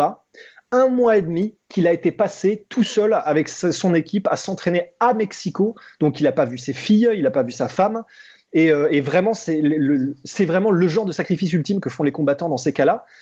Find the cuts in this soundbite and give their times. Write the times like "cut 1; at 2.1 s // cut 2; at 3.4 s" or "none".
none